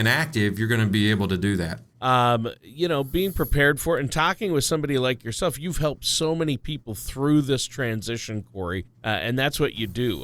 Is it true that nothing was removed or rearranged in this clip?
no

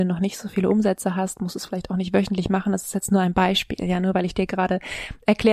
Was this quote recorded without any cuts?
yes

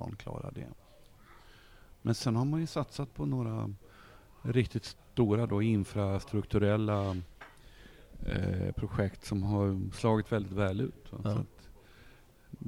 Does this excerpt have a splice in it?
no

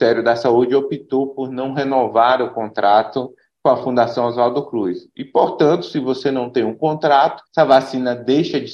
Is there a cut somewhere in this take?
yes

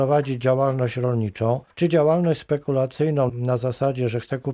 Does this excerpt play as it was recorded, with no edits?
no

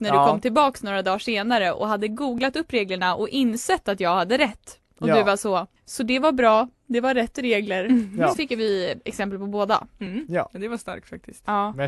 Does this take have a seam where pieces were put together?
yes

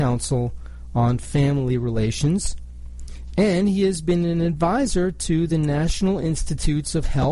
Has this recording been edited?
no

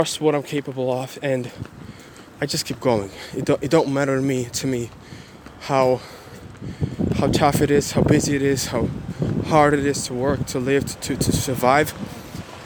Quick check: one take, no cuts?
yes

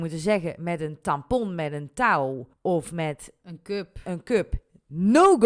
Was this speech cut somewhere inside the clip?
yes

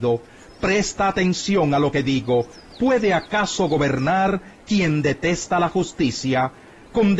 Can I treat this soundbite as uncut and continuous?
yes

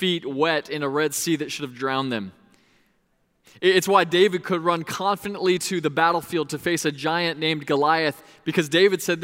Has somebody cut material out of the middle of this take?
no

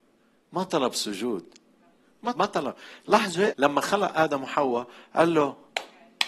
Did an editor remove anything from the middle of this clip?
yes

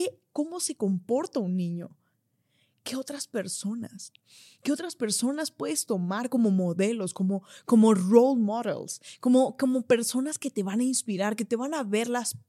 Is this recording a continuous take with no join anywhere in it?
yes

